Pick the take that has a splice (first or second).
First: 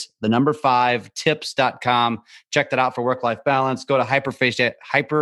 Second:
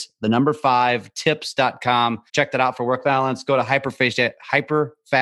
second